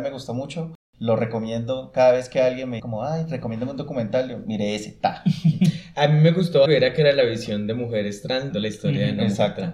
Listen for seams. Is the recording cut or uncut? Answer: cut